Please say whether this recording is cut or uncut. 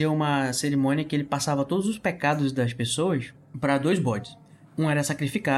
uncut